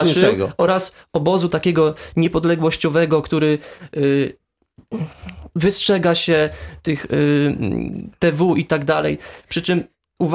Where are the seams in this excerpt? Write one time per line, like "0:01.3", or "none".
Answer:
none

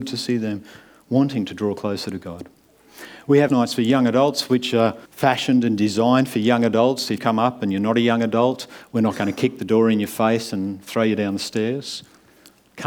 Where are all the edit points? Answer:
0:03.5
0:05.1
0:07.2

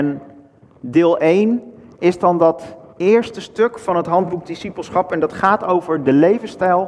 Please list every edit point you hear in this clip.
none

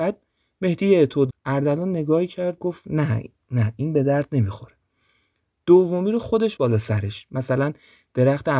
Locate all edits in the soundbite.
0:01.3
0:02.6
0:06.6

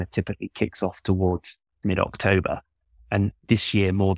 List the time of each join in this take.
none

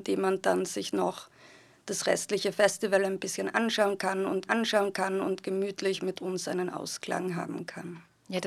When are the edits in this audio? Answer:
0:04.5

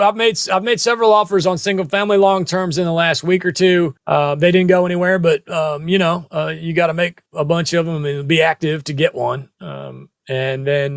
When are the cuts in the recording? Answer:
0:04.0

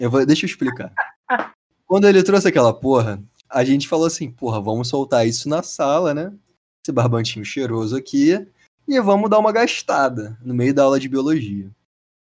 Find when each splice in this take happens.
none

